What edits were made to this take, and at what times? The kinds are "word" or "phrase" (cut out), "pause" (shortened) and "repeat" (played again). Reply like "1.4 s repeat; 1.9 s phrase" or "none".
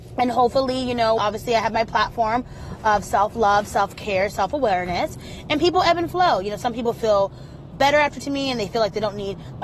1.2 s word; 7.7 s word; 8.2 s word